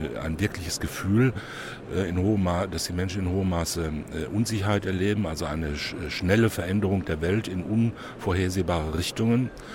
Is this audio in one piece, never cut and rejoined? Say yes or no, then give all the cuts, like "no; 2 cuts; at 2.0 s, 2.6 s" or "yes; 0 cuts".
yes; 0 cuts